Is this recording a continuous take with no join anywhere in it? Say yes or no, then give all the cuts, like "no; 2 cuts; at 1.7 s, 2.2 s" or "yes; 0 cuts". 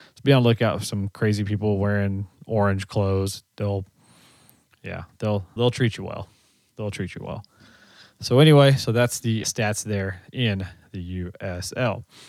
no; 2 cuts; at 5.6 s, 9.4 s